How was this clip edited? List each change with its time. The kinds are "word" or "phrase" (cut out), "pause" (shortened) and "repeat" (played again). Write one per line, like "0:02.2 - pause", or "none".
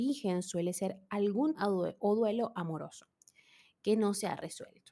0:01.5 - word

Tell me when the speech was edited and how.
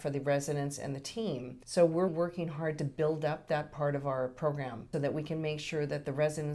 0:01.6 - pause
0:02.1 - word
0:04.9 - word

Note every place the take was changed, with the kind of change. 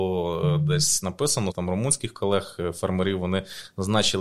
0:01.5 - word

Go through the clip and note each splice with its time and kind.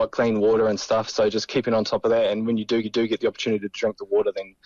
0:02.8 - repeat

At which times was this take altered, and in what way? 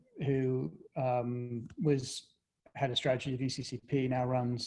none

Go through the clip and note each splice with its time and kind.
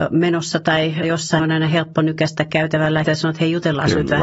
0:01.0 - word
0:01.4 - word
0:03.0 - word

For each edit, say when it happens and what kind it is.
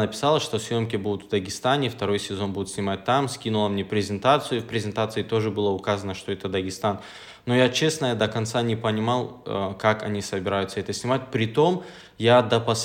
none

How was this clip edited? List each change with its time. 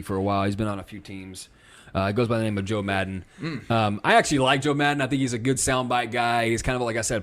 none

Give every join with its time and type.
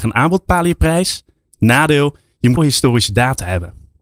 0:02.6 - word

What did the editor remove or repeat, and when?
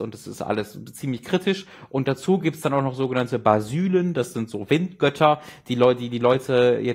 none

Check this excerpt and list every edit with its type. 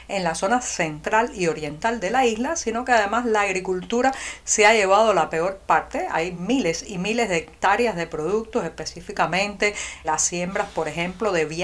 0:10.0 - word

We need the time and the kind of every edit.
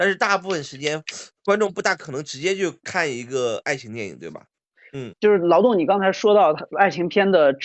0:05.1 - word

